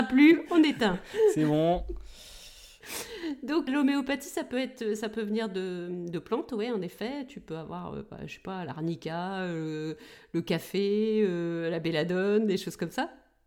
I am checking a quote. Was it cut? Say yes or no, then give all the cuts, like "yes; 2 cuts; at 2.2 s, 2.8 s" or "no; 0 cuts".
yes; 1 cut; at 3.7 s